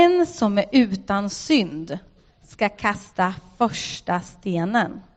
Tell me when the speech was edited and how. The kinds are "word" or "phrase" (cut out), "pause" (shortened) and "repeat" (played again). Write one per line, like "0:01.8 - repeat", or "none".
none